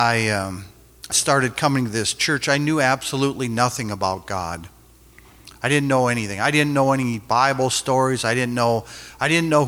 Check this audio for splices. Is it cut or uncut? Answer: cut